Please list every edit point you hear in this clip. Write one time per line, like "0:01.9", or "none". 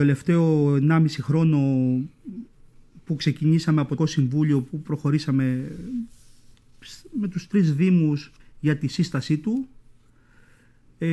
0:04.0
0:08.4